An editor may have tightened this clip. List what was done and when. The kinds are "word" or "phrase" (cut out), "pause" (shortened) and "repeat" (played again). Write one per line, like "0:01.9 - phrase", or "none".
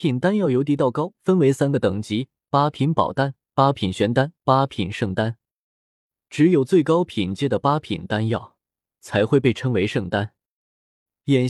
0:03.4 - pause
0:04.4 - pause